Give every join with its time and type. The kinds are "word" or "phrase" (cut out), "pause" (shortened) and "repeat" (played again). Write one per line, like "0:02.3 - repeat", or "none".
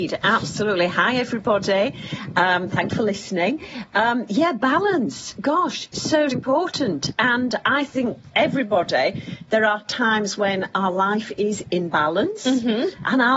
0:02.9 - word
0:06.3 - word